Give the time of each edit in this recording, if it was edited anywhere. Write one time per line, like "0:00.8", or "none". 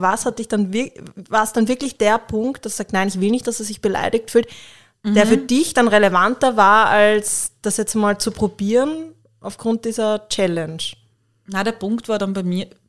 none

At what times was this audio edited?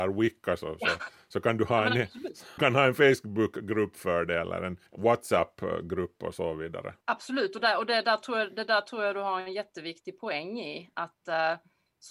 0:02.6
0:04.9
0:07.0

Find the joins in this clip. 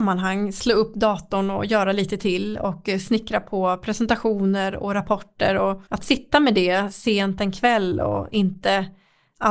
0:05.9

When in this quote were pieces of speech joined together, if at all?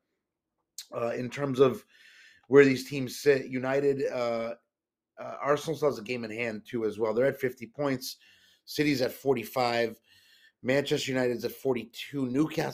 none

